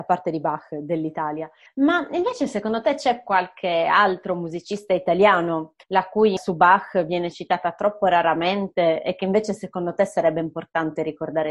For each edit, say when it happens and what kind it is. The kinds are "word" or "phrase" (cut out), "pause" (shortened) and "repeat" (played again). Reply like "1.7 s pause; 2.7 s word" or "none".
1.7 s pause; 5.8 s pause; 6.4 s word